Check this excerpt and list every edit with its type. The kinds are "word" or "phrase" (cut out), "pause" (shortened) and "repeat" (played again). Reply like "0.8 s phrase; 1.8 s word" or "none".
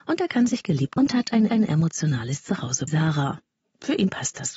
1.0 s word; 1.5 s repeat; 2.9 s word